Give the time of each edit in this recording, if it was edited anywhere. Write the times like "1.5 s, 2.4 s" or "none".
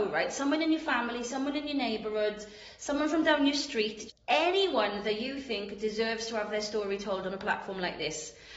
4.1 s